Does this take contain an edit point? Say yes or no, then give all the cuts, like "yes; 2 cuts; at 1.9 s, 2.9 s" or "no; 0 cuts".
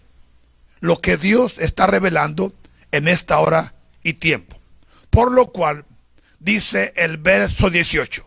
no; 0 cuts